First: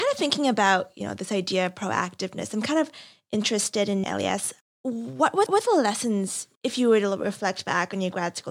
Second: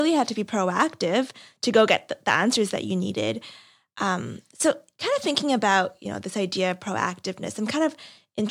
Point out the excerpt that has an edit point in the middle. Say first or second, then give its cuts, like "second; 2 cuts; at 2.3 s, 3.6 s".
first; 4 cuts; at 4.0 s, 4.6 s, 5.5 s, 6.6 s